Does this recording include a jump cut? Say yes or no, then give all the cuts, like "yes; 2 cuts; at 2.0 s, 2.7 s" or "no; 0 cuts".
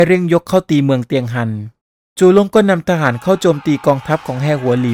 yes; 1 cut; at 1.8 s